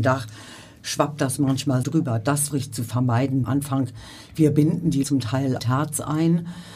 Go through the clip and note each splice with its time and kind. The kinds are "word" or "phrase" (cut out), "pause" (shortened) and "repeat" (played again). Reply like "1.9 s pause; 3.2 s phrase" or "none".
1.8 s word; 2.5 s word; 3.4 s phrase; 5.0 s word; 5.6 s phrase